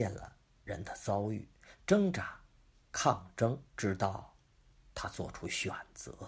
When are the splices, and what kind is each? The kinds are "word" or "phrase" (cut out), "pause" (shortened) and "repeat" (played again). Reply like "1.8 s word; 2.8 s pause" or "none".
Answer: 3.7 s pause